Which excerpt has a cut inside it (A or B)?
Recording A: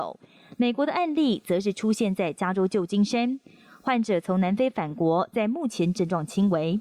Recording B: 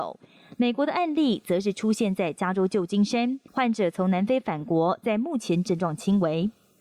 B